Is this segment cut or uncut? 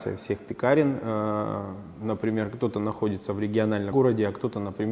cut